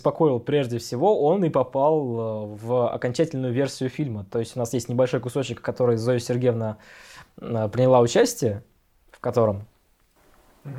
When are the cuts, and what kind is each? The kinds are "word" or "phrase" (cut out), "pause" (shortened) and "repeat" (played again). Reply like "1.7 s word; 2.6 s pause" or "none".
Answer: none